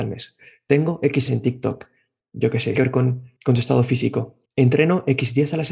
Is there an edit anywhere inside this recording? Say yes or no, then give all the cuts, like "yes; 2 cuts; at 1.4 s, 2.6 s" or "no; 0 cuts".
yes; 4 cuts; at 1.3 s, 2.8 s, 3.4 s, 4.5 s